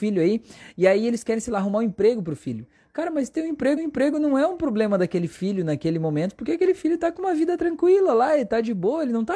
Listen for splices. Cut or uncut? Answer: cut